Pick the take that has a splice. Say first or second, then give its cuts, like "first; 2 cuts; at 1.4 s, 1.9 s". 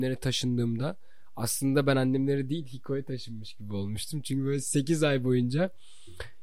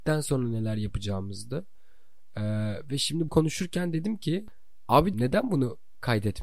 second; 2 cuts; at 3.3 s, 5.1 s